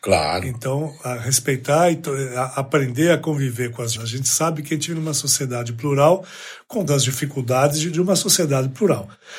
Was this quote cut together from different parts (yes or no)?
yes